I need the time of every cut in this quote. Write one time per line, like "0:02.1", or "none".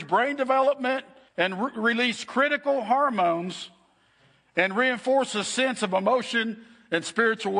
0:01.3